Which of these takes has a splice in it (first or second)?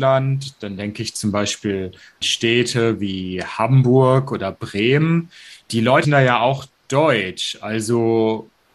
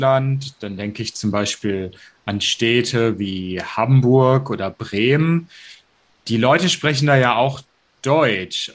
first